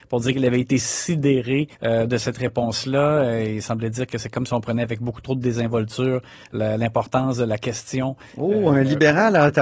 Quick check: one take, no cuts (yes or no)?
no